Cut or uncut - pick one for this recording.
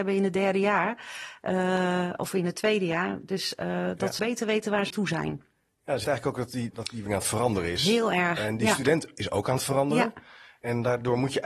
cut